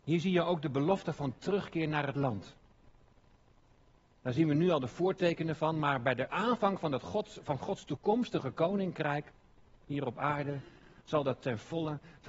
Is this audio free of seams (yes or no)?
yes